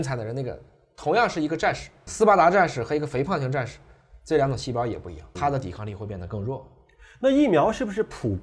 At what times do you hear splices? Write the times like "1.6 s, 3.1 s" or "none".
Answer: 2.1 s, 5.4 s